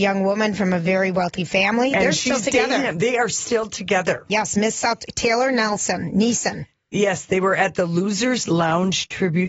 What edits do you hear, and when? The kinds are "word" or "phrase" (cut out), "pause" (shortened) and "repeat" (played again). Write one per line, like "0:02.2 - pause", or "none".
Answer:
none